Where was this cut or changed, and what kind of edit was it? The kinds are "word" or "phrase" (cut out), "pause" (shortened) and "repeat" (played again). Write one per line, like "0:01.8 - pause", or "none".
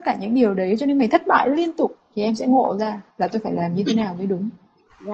0:03.1 - pause